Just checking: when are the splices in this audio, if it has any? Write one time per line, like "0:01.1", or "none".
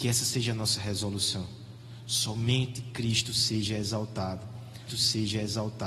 0:04.9